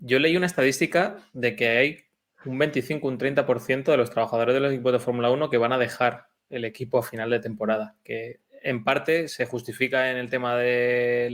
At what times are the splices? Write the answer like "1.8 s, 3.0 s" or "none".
none